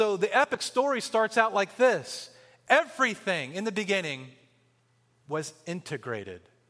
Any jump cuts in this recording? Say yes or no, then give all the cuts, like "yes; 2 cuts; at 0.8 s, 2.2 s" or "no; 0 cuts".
no; 0 cuts